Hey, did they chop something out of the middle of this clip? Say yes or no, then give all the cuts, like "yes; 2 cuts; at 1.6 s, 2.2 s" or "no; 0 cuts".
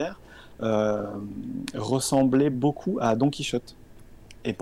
no; 0 cuts